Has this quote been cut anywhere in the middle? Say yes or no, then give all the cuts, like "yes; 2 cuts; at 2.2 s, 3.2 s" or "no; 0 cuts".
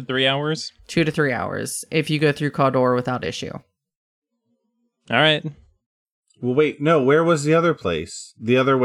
no; 0 cuts